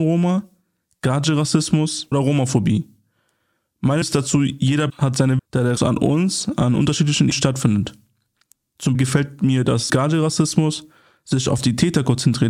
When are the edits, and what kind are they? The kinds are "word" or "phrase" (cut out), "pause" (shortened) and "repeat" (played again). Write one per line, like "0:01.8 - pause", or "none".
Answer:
0:02.1 - word
0:04.0 - word
0:04.9 - word
0:05.4 - word
0:05.8 - word
0:07.3 - word
0:08.9 - word
0:09.9 - word

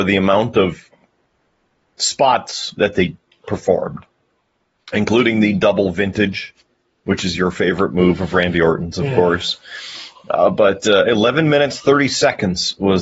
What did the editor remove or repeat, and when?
none

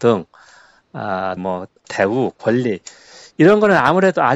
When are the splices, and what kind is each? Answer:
0:01.4 - word
0:01.8 - word

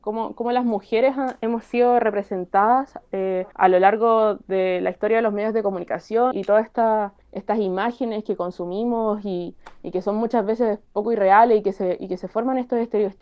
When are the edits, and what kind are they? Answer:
0:03.5 - pause
0:06.3 - word
0:07.2 - pause

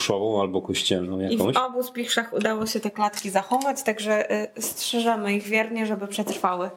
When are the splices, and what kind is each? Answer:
none

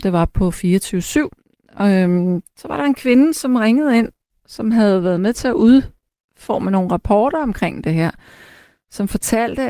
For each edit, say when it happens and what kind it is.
none

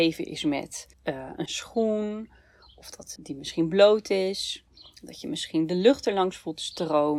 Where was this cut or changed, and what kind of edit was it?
0:00.9 - pause
0:01.5 - phrase
0:03.2 - word

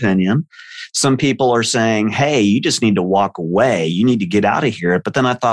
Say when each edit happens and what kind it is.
none

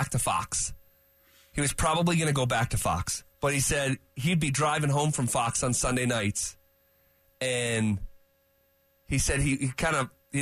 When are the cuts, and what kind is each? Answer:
0:03.3 - pause

